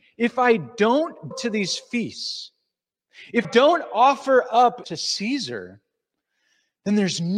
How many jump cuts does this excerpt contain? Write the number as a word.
three